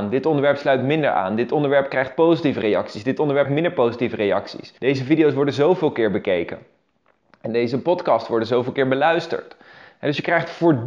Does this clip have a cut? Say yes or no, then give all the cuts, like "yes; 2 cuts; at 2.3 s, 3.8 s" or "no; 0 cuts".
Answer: yes; 2 cuts; at 3.5 s, 4.8 s